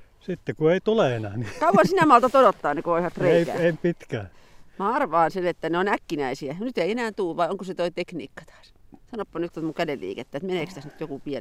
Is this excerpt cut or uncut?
cut